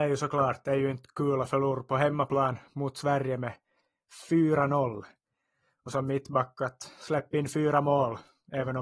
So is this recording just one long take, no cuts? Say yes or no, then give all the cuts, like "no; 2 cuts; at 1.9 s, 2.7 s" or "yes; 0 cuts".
yes; 0 cuts